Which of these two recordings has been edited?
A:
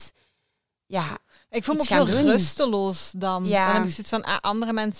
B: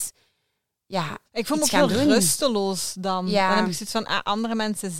B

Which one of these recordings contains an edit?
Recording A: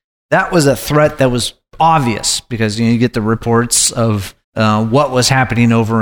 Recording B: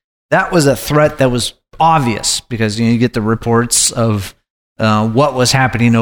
A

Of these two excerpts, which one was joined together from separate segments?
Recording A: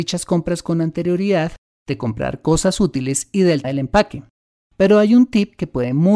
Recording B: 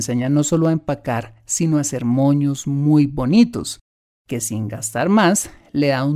A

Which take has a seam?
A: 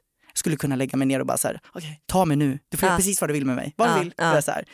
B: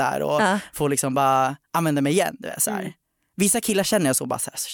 A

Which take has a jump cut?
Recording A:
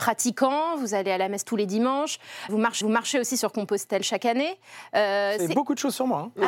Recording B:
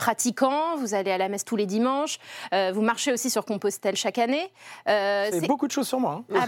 A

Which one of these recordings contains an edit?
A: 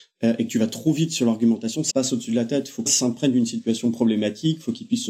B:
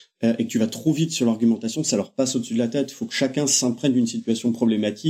A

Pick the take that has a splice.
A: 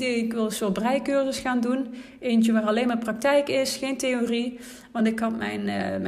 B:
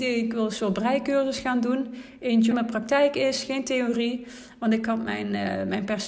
B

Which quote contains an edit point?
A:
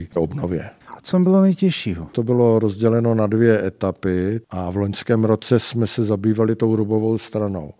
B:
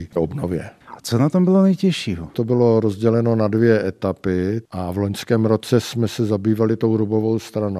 A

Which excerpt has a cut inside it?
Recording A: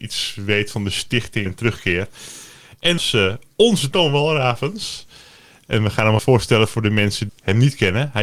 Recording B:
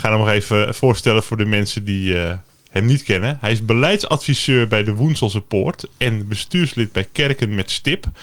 A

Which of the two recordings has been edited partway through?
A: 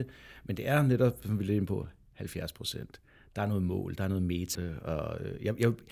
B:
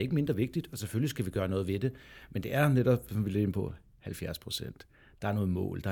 A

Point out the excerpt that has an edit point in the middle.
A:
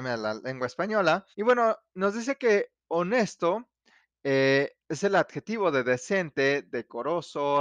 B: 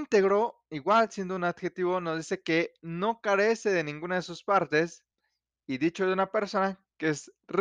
A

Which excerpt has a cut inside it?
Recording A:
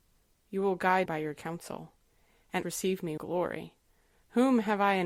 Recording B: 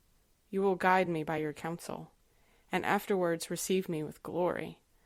A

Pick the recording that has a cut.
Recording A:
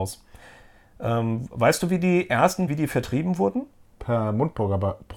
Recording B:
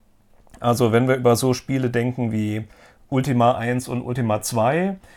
A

